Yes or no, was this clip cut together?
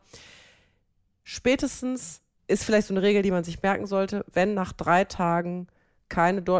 no